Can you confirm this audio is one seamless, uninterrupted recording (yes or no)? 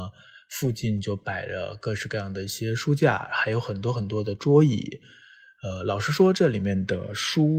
yes